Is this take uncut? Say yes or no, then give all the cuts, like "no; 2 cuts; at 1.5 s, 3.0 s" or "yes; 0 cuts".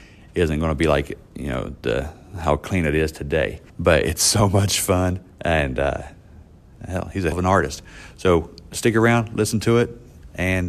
no; 2 cuts; at 3.7 s, 7.3 s